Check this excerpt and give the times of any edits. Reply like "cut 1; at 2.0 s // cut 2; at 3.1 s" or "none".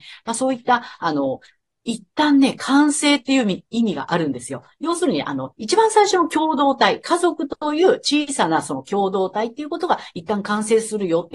none